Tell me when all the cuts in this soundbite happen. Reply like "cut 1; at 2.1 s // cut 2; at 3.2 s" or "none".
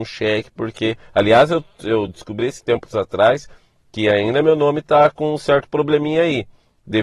none